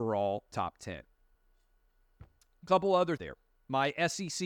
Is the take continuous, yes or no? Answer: no